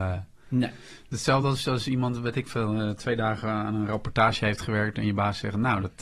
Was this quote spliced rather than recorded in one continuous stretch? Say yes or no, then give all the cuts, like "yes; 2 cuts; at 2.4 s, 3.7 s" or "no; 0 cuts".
no; 0 cuts